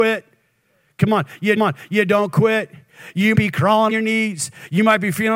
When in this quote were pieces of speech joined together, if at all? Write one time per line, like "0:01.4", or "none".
0:01.6
0:03.3
0:03.9